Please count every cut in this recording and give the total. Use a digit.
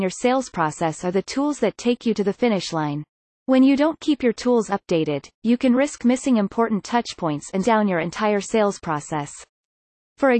2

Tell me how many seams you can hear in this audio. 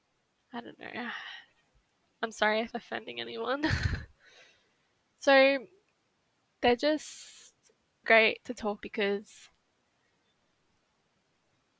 3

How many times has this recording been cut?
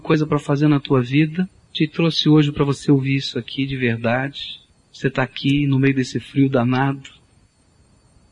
2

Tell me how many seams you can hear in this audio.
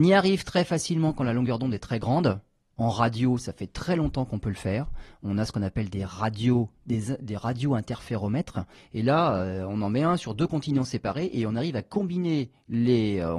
0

